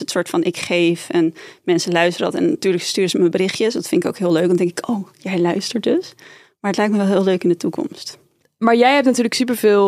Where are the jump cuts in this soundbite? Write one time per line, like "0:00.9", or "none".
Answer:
none